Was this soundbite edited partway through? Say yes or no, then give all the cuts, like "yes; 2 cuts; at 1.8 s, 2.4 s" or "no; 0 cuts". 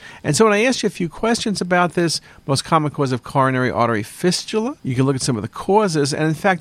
yes; 1 cut; at 4.8 s